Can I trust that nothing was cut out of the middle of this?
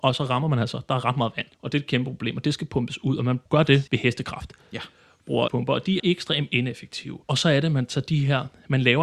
no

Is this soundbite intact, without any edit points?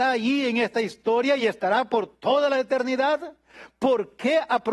yes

